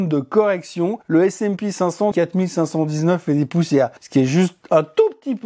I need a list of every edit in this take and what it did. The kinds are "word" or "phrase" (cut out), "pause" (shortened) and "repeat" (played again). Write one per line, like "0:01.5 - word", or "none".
0:01.0 - pause
0:02.1 - phrase
0:04.0 - pause